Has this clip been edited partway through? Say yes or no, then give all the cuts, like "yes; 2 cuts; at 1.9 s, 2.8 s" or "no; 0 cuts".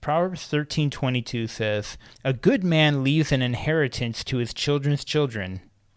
yes; 1 cut; at 2.1 s